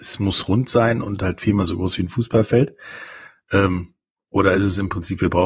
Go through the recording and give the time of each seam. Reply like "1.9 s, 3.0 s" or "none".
none